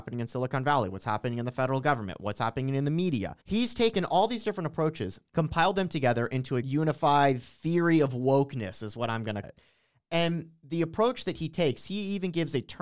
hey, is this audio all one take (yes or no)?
no